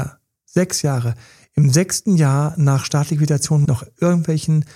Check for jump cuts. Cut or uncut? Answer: cut